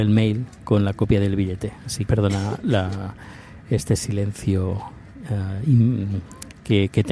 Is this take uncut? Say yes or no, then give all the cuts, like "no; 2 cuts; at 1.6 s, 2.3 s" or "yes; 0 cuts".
no; 1 cut; at 2.1 s